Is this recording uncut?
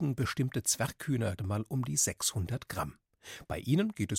no; 1 cut; at 1.4 s

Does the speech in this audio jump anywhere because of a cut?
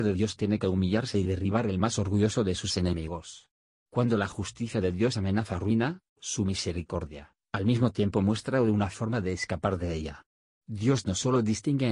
no; 0 cuts

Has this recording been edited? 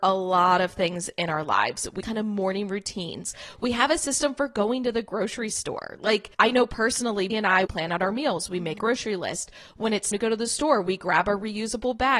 yes; 6 cuts; at 2.0 s, 6.3 s, 7.3 s, 7.6 s, 8.8 s, 10.1 s

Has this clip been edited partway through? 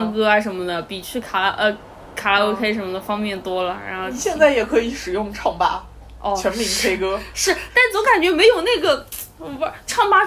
no; 0 cuts

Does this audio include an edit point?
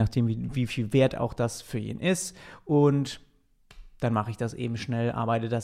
no; 0 cuts

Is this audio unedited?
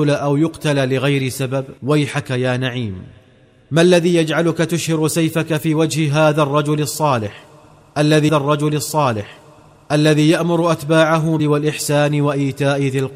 no; 3 cuts; at 1.8 s, 8.3 s, 11.4 s

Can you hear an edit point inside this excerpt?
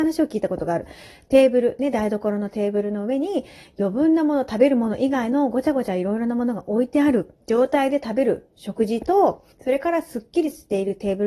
yes; 1 cut; at 9.5 s

